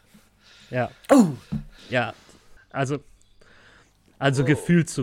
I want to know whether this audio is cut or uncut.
cut